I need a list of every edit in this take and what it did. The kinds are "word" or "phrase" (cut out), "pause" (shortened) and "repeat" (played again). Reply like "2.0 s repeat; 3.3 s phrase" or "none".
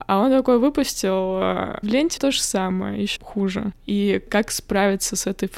1.8 s phrase; 2.2 s word; 3.2 s word